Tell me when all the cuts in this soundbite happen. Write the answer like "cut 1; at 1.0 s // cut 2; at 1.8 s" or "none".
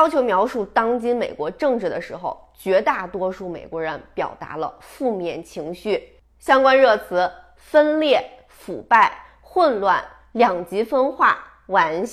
none